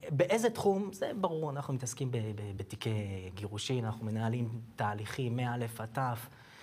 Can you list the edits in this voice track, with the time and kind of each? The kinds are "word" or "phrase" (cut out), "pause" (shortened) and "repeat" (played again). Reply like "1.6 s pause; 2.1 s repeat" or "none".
none